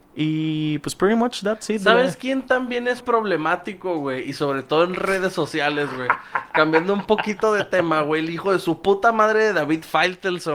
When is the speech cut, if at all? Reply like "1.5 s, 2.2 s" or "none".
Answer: 3.0 s